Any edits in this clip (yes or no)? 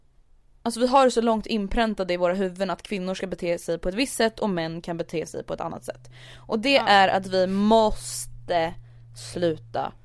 no